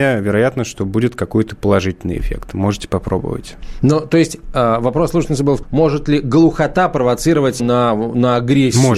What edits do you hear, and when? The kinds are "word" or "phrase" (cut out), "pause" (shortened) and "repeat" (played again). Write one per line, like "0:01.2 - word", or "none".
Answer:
0:05.6 - word
0:07.6 - word